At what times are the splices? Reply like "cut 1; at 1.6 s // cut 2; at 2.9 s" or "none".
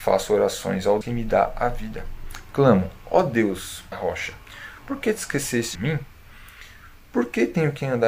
cut 1; at 1.0 s // cut 2; at 3.9 s // cut 3; at 5.7 s